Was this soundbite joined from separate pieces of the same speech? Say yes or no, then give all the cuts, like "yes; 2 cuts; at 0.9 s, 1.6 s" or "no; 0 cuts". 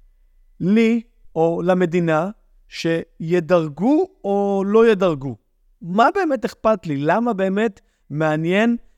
no; 0 cuts